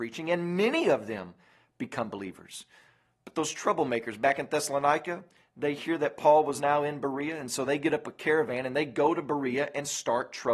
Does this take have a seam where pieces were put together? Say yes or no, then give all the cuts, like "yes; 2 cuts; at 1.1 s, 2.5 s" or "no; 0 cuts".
no; 0 cuts